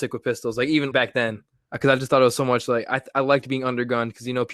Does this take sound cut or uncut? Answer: cut